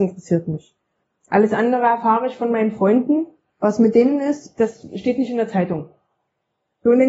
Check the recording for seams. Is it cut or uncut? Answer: uncut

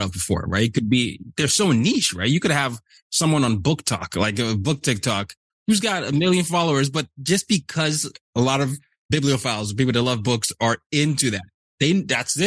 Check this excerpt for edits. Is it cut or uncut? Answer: uncut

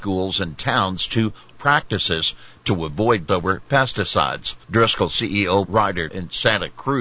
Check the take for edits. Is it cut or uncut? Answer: cut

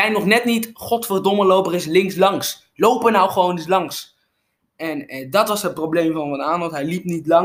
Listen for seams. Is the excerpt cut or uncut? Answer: uncut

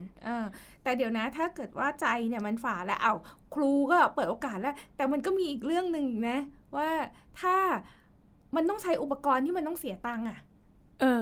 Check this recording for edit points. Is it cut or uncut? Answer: uncut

